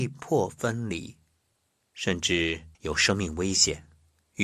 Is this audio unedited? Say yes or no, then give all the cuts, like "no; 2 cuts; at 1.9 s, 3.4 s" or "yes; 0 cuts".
no; 1 cut; at 2.7 s